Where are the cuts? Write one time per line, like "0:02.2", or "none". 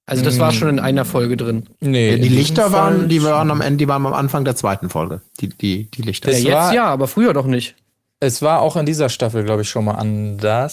0:01.7